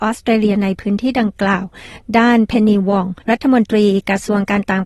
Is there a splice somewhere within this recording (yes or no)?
yes